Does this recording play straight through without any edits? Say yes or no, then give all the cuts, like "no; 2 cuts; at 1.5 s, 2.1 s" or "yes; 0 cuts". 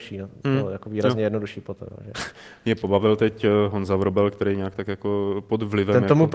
yes; 0 cuts